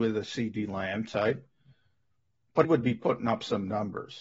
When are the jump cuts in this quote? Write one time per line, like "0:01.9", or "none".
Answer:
0:02.6